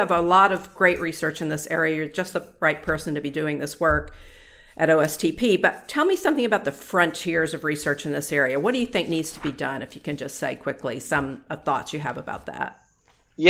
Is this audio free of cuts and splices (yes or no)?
yes